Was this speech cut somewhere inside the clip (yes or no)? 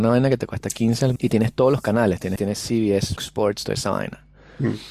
yes